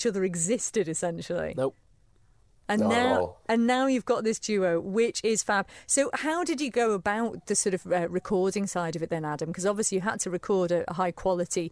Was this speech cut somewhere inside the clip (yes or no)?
no